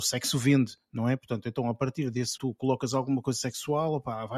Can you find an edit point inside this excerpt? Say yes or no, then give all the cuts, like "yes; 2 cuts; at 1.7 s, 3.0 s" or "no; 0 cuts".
yes; 1 cut; at 2.4 s